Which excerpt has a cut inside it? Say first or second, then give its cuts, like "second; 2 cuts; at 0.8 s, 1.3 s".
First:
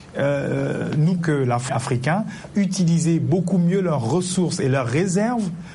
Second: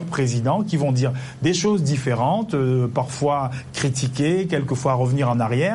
first; 3 cuts; at 1.2 s, 1.7 s, 2.5 s